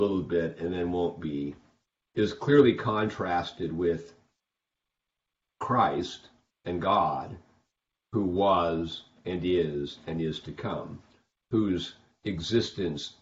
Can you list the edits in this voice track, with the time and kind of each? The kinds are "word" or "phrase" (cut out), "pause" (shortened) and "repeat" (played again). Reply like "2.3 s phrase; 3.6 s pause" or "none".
none